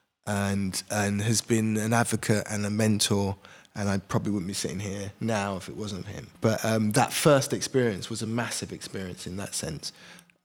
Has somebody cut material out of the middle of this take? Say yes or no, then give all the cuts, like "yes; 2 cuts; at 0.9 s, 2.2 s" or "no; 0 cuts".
yes; 1 cut; at 6.3 s